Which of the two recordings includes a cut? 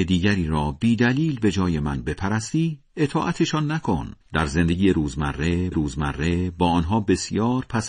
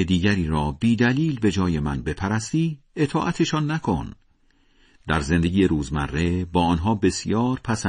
first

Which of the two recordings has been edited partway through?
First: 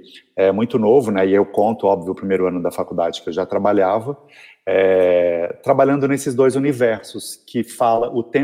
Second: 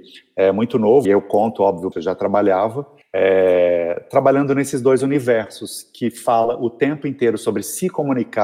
second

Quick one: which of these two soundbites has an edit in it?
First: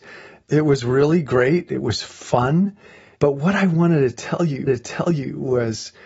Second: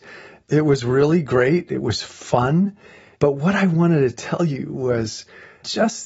first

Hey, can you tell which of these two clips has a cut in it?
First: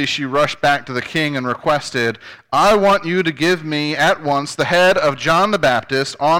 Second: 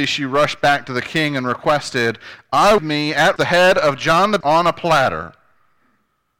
second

